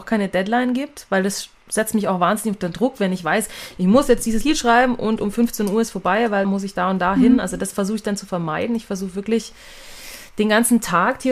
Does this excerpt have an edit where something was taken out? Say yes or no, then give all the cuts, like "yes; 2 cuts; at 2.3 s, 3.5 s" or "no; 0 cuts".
yes; 1 cut; at 6.4 s